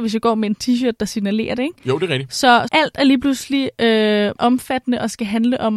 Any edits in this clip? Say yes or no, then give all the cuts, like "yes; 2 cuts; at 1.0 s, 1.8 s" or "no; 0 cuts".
yes; 2 cuts; at 2.7 s, 4.4 s